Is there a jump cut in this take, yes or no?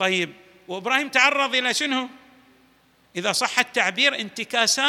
no